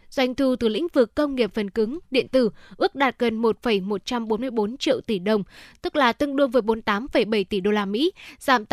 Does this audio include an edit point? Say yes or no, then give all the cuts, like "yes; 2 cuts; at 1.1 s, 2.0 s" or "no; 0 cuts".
no; 0 cuts